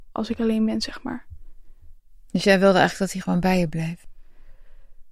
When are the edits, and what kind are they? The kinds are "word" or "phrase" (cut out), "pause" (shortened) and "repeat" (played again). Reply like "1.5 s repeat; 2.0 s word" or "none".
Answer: none